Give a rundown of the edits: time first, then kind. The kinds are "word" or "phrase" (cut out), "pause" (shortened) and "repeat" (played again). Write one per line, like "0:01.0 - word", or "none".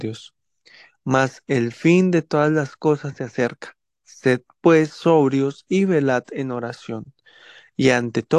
none